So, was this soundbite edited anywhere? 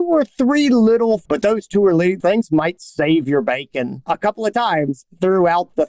yes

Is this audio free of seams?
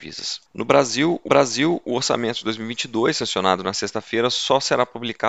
no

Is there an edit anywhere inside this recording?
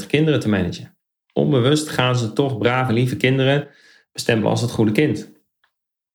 no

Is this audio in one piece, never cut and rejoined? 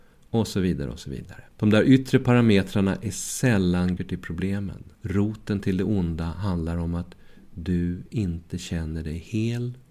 no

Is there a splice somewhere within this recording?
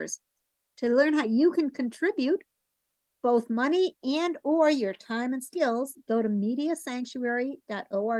no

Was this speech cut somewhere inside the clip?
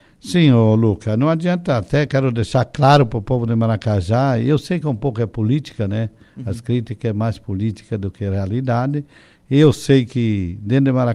no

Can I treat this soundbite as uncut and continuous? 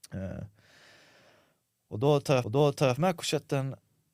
no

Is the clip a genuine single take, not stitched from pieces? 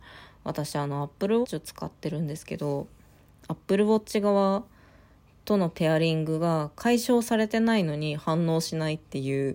no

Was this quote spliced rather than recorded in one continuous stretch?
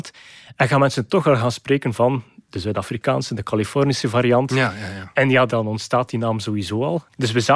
no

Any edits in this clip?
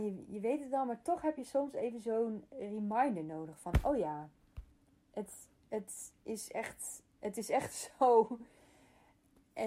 no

